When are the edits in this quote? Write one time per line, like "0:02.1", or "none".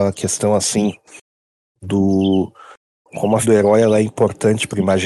0:03.4